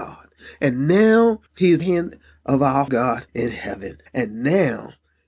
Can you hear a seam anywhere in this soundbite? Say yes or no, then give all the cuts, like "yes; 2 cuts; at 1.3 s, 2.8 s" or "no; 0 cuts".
yes; 5 cuts; at 1.5 s, 1.8 s, 2.9 s, 3.3 s, 4.1 s